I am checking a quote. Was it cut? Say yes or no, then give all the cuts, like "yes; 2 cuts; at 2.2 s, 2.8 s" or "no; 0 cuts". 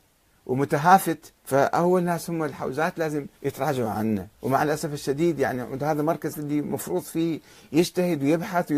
yes; 4 cuts; at 1.4 s, 3.4 s, 4.3 s, 6.3 s